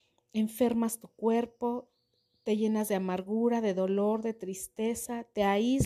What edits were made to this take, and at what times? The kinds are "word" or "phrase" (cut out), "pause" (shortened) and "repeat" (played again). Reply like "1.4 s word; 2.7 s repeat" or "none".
none